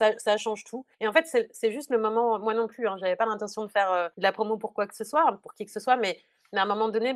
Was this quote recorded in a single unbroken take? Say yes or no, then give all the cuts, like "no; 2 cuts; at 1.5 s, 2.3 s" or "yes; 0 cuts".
no; 2 cuts; at 0.9 s, 4.1 s